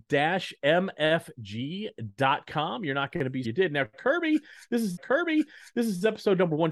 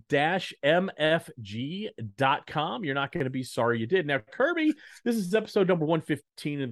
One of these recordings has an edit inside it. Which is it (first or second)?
first